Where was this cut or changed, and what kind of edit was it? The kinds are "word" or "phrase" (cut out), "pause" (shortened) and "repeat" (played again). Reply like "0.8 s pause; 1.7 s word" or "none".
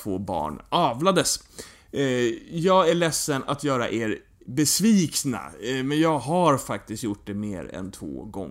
none